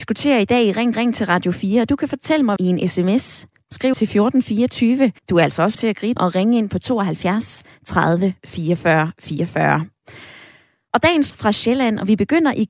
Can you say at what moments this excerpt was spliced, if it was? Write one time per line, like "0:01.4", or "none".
0:00.9
0:02.6
0:03.9
0:05.2
0:05.7
0:06.2
0:11.3